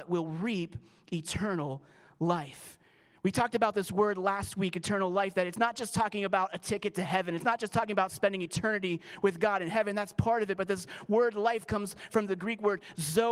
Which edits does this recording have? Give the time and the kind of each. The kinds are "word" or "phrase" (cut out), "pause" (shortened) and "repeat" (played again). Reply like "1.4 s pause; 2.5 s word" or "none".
none